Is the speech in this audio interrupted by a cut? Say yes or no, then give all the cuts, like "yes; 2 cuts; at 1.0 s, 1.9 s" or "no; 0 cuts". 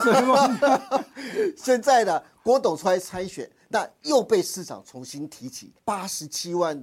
no; 0 cuts